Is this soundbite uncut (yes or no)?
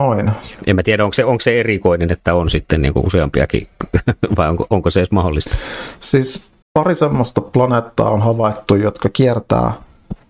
no